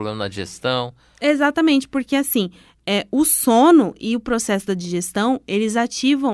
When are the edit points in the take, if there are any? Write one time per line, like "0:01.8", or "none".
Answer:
none